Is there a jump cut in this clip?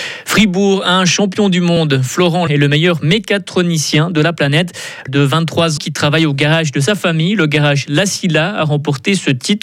yes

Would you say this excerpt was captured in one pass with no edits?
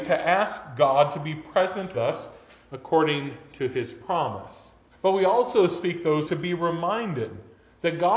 no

